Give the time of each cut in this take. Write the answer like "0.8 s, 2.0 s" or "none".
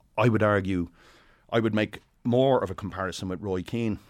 none